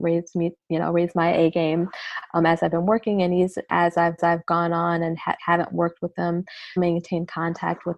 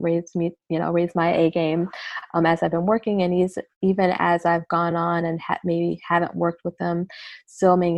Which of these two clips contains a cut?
first; 4 cuts; at 3.7 s, 4.2 s, 5.4 s, 6.8 s

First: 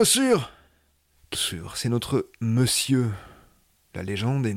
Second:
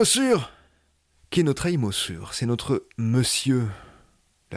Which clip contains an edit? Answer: first; 1 cut; at 1.3 s

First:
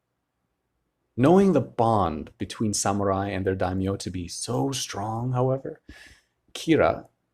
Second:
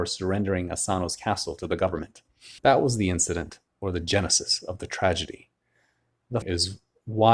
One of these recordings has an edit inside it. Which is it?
second; 2 cuts; at 2.6 s, 6.4 s

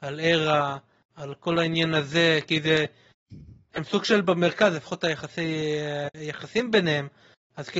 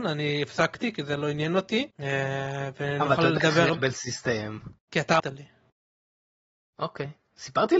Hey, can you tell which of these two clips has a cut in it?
second; 3 cuts; at 1.9 s, 4.8 s, 5.2 s

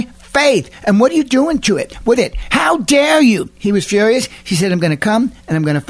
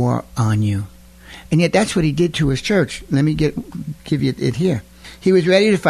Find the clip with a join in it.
first; 1 cut; at 2.2 s

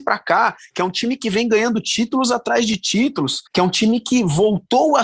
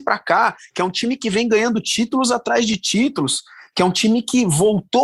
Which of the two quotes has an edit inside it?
first; 1 cut; at 3.5 s

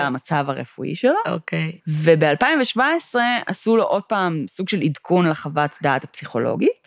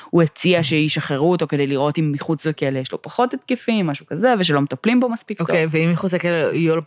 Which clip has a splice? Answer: first; 1 cut; at 1.8 s

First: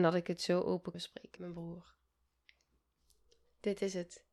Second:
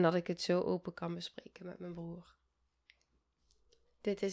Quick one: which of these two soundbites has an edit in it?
first; 2 cuts; at 0.9 s, 1.4 s

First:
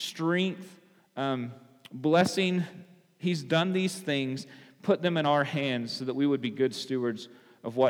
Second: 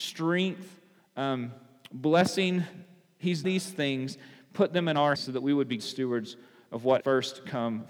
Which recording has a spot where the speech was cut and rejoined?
second; 4 cuts; at 3.4 s, 5.1 s, 5.8 s, 7.0 s

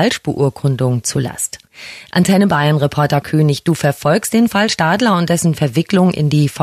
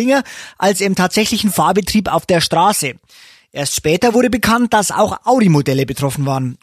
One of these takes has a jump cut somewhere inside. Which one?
first; 1 cut; at 3.2 s

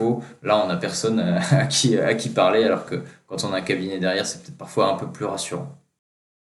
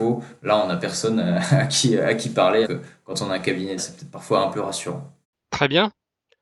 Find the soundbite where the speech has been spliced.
second; 4 cuts; at 2.6 s, 3.8 s, 4.5 s, 5.2 s

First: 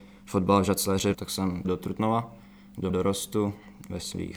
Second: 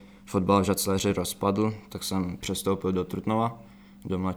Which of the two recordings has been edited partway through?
first; 3 cuts; at 1.1 s, 1.6 s, 2.9 s

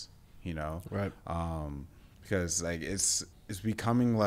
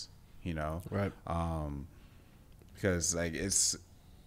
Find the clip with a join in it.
first; 2 cuts; at 2.1 s, 3.3 s

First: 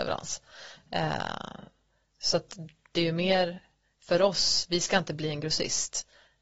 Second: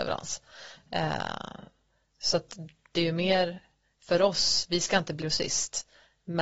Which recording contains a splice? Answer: second; 1 cut; at 5.2 s

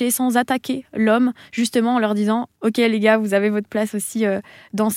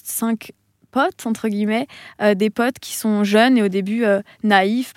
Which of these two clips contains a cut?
first; 1 cut; at 2.6 s

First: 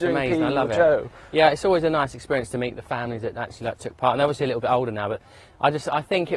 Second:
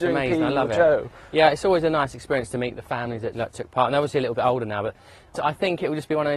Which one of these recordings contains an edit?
second; 2 cuts; at 3.3 s, 5.4 s

